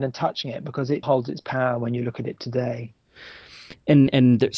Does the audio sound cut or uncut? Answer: cut